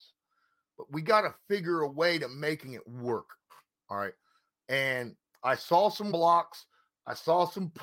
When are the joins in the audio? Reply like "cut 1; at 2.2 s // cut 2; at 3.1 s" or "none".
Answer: cut 1; at 6.1 s